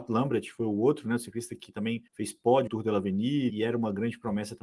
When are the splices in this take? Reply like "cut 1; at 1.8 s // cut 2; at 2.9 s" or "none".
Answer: cut 1; at 2.1 s // cut 2; at 2.7 s // cut 3; at 3.5 s